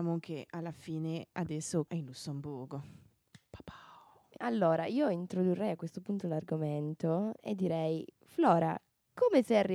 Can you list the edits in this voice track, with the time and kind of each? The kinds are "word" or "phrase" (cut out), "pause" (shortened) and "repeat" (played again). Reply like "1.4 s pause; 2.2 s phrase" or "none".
1.9 s word; 4.4 s word